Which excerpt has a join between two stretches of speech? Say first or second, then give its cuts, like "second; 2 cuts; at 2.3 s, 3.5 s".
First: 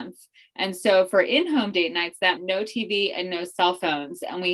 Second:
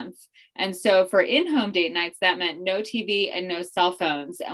first; 1 cut; at 2.4 s